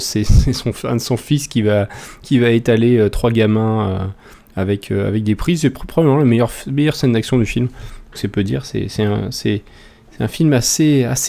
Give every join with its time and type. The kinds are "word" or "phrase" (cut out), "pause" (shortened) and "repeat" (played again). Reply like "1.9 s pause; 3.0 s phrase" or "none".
none